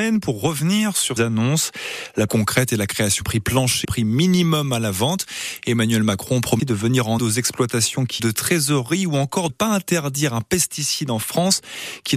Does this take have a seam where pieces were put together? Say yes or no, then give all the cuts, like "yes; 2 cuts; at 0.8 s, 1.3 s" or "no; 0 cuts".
yes; 8 cuts; at 1.2 s, 2.3 s, 3.2 s, 3.8 s, 6.6 s, 7.2 s, 8.2 s, 9.5 s